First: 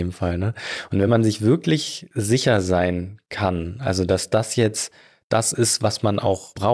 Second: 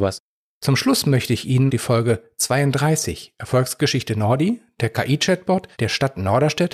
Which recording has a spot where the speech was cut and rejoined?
second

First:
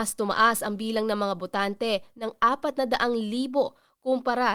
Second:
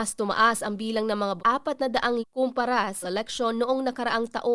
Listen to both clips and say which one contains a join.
second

